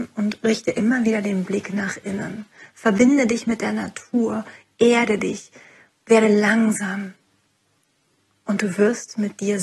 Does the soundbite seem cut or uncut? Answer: uncut